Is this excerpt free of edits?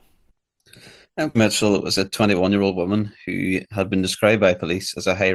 no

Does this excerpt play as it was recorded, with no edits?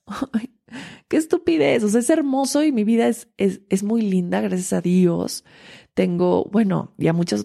yes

